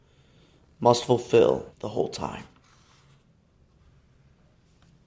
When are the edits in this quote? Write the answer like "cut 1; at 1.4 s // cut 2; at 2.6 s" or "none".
cut 1; at 1.7 s

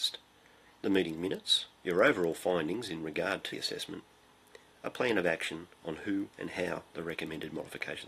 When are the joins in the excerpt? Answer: cut 1; at 1.8 s // cut 2; at 3.5 s // cut 3; at 5.7 s

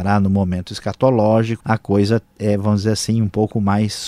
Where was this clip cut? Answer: cut 1; at 1.6 s

